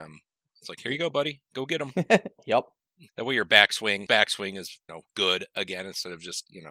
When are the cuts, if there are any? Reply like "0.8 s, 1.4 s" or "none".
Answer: 3.1 s, 4.1 s, 4.9 s